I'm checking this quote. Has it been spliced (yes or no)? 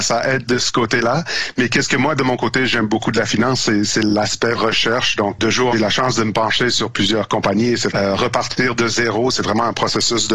yes